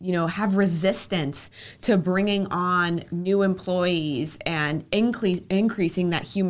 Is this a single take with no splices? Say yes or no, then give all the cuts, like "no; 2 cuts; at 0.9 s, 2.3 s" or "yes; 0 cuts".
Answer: yes; 0 cuts